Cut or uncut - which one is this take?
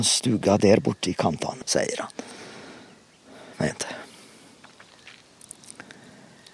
cut